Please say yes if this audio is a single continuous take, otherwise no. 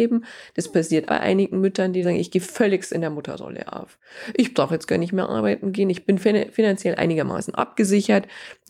no